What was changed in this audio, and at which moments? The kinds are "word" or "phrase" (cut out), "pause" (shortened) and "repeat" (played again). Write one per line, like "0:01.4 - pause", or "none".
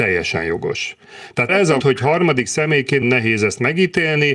0:01.5 - word
0:01.8 - word
0:03.0 - word